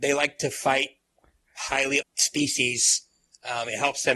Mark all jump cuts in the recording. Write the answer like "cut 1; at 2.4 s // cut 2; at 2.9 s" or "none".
cut 1; at 2.0 s